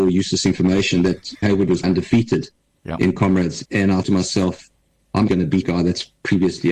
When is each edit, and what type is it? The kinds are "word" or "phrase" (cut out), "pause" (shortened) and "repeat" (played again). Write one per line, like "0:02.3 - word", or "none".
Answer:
0:01.4 - word
0:01.8 - word
0:03.7 - word
0:04.0 - word
0:05.3 - word
0:05.6 - word